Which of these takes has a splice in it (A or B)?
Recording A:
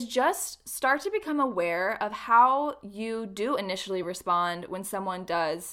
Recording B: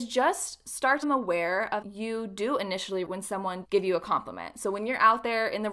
B